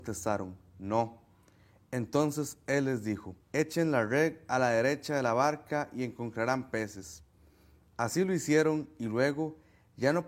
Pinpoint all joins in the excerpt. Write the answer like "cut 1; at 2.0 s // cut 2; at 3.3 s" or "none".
cut 1; at 3.4 s